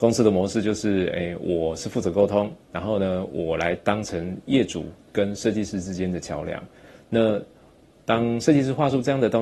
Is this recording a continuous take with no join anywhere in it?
yes; 0 cuts

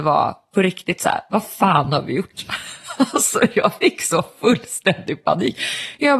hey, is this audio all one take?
yes; 0 cuts

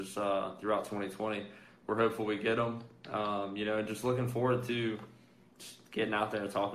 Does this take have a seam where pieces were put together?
no; 0 cuts

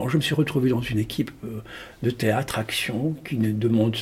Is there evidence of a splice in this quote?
no; 0 cuts

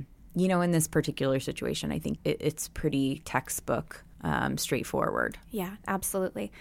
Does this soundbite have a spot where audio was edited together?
yes; 2 cuts; at 2.2 s, 4.1 s

